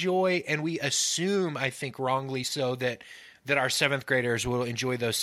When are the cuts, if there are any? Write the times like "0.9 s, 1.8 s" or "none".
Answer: none